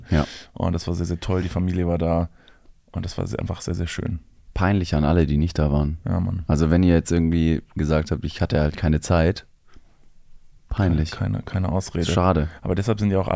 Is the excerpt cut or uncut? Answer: uncut